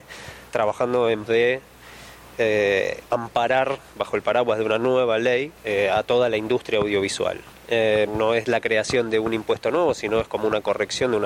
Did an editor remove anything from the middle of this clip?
yes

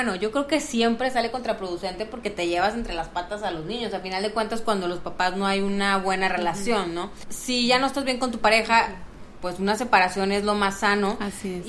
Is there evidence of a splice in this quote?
no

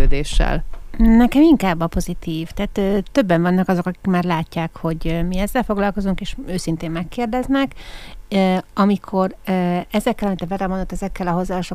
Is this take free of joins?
yes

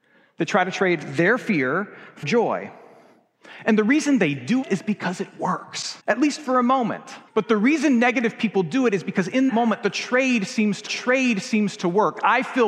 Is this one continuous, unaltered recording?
no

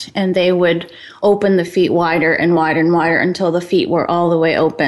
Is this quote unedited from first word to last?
yes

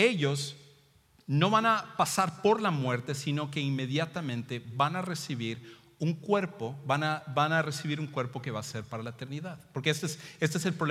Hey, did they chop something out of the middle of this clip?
no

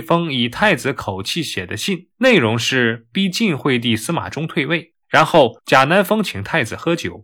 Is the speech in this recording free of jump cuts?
no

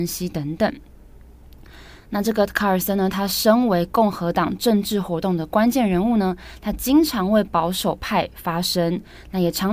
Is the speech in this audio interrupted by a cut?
no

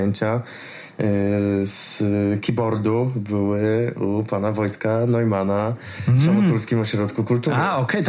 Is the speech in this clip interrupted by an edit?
no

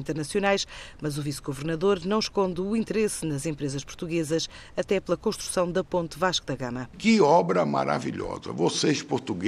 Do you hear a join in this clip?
no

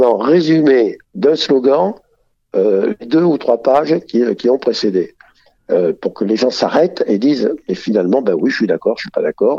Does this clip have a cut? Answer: yes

